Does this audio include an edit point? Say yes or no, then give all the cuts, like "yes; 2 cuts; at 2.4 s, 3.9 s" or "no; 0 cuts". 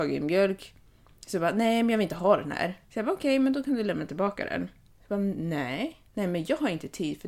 yes; 3 cuts; at 2.8 s, 4.9 s, 6.1 s